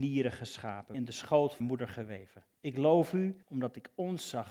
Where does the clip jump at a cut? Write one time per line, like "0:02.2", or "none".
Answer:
0:00.9
0:01.6
0:02.5
0:03.4